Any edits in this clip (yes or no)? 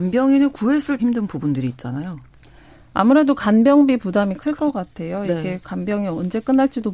yes